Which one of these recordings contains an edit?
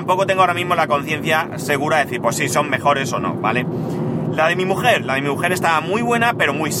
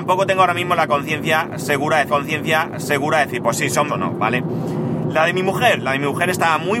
second; 2 cuts; at 2.1 s, 3.9 s

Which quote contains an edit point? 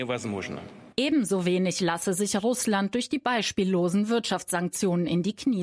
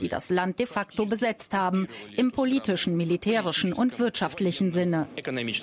first; 1 cut; at 0.9 s

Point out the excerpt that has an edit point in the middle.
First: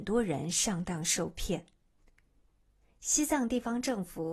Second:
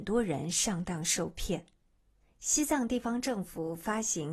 second; 1 cut; at 1.9 s

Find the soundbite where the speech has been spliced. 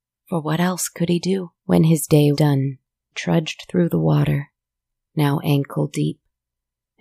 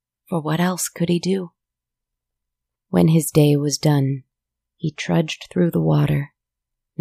first; 3 cuts; at 1.6 s, 2.3 s, 3.1 s

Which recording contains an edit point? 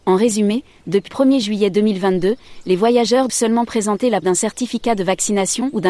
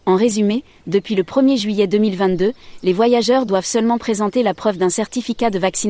first; 3 cuts; at 1.1 s, 3.3 s, 4.2 s

